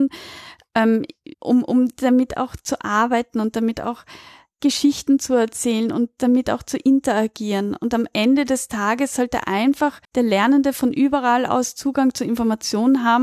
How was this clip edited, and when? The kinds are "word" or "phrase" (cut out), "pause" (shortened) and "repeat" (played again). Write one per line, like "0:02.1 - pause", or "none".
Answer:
0:01.3 - pause
0:10.0 - pause